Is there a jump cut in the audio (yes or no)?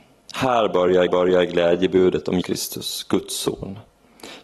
yes